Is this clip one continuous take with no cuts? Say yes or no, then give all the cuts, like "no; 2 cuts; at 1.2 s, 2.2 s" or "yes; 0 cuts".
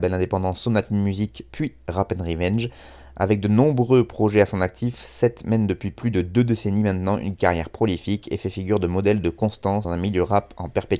no; 1 cut; at 9.8 s